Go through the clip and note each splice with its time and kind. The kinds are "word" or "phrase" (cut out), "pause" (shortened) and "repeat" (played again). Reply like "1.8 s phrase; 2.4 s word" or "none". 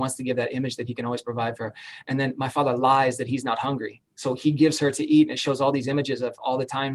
4.1 s pause